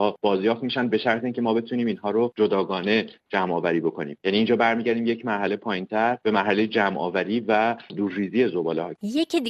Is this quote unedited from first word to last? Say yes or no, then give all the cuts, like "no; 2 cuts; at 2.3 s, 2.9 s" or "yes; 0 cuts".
yes; 0 cuts